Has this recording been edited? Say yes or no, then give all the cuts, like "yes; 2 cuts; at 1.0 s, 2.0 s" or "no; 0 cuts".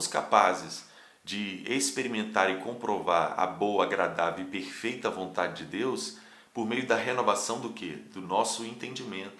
no; 0 cuts